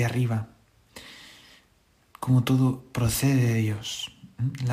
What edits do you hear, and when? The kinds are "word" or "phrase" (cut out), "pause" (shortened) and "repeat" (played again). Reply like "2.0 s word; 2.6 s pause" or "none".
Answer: none